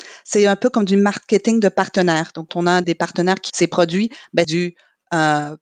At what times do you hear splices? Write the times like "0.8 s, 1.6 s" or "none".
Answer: 2.5 s, 2.8 s, 3.5 s, 4.4 s